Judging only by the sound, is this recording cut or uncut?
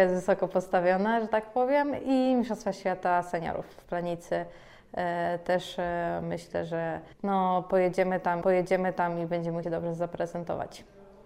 cut